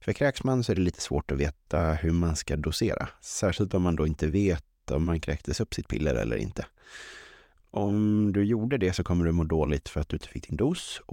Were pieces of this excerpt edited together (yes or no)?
yes